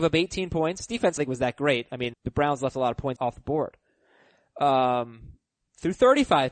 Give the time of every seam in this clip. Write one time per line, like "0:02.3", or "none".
0:01.2
0:02.1
0:03.2
0:05.6